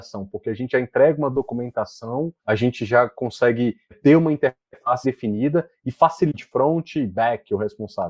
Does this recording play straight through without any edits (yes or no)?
no